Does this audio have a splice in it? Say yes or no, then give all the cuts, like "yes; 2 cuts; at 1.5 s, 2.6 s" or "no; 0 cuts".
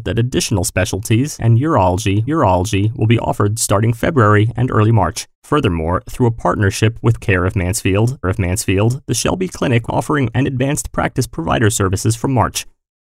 yes; 7 cuts; at 1.4 s, 2.3 s, 5.3 s, 7.2 s, 8.2 s, 9.9 s, 10.3 s